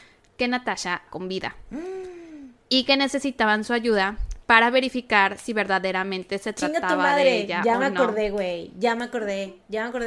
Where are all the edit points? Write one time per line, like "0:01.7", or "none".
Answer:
0:01.1